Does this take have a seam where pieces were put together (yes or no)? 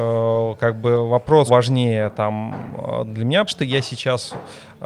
yes